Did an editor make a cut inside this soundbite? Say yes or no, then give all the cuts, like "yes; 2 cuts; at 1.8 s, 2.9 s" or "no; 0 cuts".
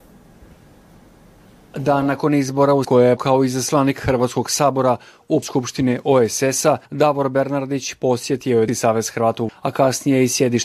yes; 6 cuts; at 2.8 s, 3.2 s, 5.4 s, 6.9 s, 8.7 s, 9.5 s